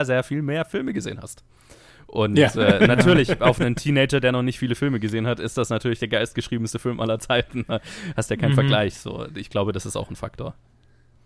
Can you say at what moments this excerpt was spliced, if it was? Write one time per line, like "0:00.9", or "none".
none